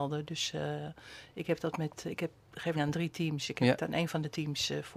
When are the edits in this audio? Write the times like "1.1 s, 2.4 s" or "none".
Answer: 2.7 s